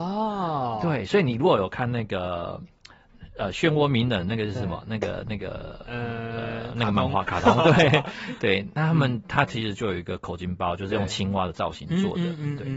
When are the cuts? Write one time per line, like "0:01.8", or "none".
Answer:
none